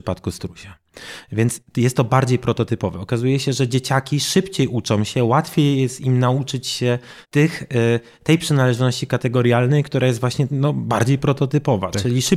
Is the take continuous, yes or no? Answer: no